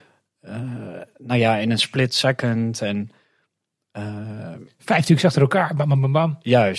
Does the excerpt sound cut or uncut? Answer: uncut